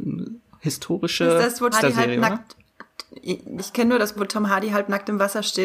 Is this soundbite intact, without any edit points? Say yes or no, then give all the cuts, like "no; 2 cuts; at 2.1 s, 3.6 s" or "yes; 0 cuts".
no; 3 cuts; at 1.7 s, 3.6 s, 4.2 s